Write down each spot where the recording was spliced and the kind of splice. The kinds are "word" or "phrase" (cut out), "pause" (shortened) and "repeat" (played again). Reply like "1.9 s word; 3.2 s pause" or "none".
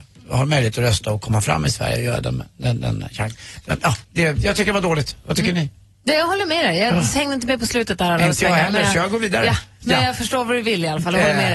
4.0 s pause

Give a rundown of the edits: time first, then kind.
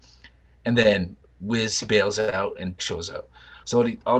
2.8 s word

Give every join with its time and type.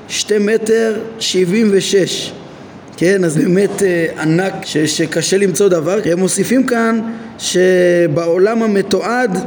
3.3 s word; 4.6 s word; 6.0 s word

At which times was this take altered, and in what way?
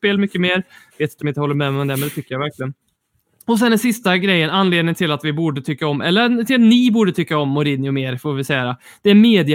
1.2 s word

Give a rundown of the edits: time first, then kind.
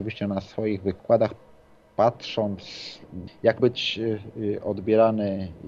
3.3 s word; 3.6 s word

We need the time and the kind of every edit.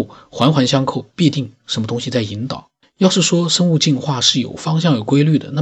2.8 s pause

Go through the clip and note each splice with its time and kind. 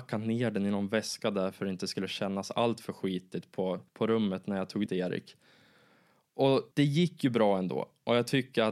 3.9 s pause; 4.9 s word; 6.7 s pause

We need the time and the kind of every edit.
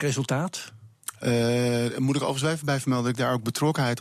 none

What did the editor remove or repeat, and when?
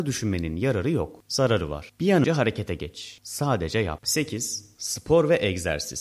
2.2 s word

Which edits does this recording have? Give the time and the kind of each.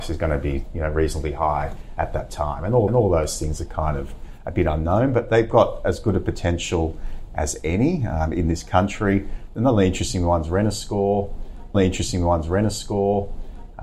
2.9 s repeat; 11.7 s repeat

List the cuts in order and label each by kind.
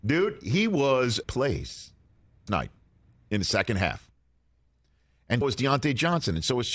1.2 s word; 2.5 s word; 5.4 s word

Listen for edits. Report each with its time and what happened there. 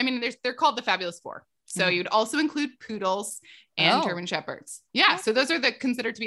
none

